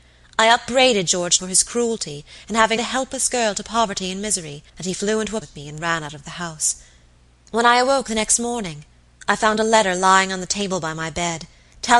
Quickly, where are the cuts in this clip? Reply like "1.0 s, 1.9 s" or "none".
1.4 s, 2.8 s, 4.7 s, 5.4 s